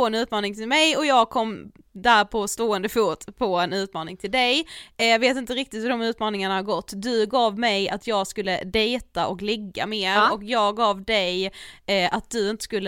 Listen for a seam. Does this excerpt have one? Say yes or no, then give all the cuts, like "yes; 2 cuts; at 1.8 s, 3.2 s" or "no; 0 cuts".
no; 0 cuts